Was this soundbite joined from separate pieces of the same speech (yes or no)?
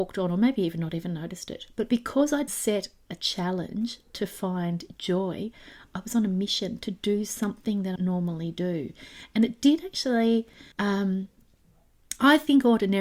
yes